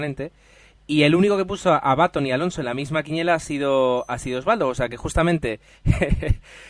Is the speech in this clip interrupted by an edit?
no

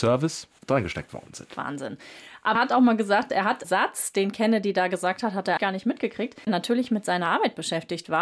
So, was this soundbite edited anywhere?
yes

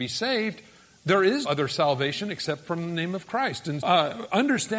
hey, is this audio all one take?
no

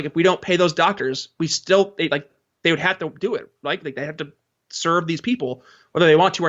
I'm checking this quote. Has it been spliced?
no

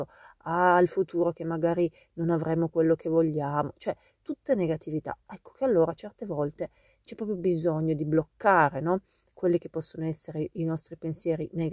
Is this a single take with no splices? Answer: yes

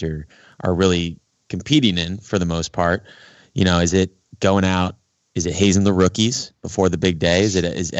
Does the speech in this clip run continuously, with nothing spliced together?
yes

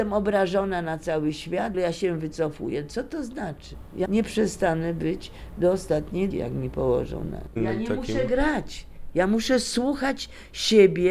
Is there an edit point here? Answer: yes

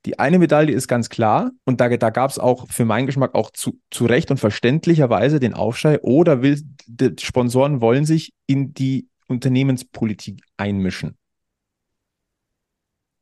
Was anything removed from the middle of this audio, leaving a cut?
yes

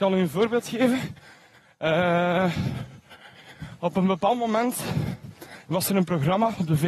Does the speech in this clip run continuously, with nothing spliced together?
yes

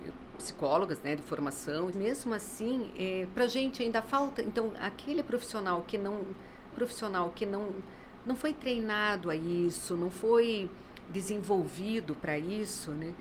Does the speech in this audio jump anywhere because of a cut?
yes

